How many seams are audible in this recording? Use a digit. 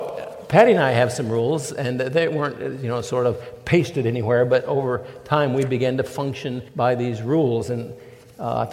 1